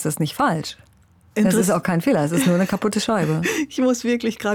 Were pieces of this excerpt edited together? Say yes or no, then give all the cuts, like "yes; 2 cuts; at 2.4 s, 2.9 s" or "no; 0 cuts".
yes; 1 cut; at 1.0 s